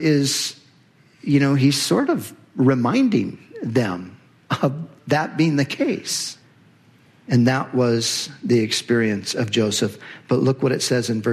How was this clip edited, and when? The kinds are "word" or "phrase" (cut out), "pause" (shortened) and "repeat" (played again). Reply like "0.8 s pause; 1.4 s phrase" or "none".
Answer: none